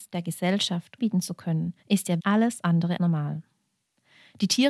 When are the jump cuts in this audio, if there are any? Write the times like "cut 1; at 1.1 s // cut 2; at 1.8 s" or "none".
cut 1; at 1.0 s // cut 2; at 1.8 s // cut 3; at 2.2 s // cut 4; at 3.0 s